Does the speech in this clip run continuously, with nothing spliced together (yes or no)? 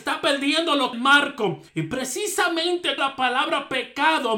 no